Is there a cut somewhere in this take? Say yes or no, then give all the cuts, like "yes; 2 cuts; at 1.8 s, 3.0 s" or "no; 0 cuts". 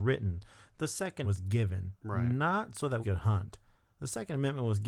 yes; 2 cuts; at 1.2 s, 3.0 s